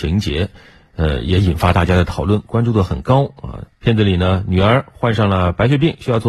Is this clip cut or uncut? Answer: cut